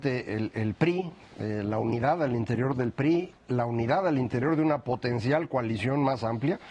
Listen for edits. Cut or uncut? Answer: cut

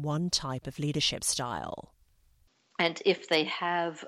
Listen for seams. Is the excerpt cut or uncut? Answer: uncut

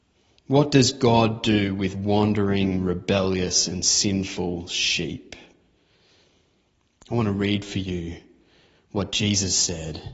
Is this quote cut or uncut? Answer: uncut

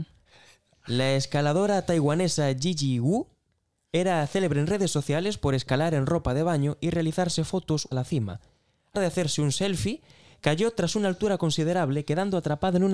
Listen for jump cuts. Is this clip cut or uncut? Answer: cut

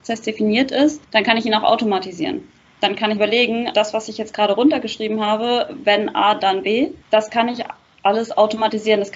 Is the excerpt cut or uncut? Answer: cut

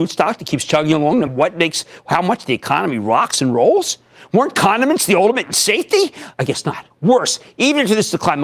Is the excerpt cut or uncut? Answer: cut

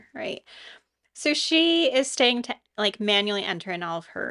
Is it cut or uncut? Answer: uncut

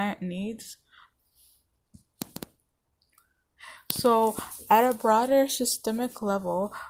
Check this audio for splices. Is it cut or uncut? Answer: uncut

